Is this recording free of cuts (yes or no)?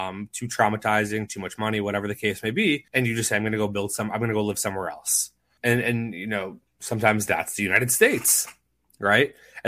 no